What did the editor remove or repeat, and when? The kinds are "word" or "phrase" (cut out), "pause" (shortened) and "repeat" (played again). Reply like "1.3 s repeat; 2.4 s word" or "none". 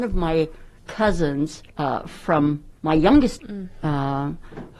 1.7 s pause; 2.8 s pause; 3.4 s word